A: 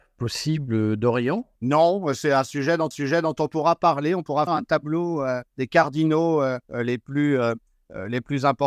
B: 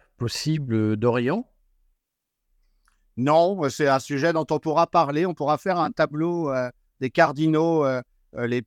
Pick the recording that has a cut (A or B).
A